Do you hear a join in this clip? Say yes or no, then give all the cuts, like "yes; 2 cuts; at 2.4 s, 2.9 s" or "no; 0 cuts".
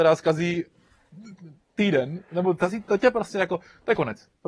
no; 0 cuts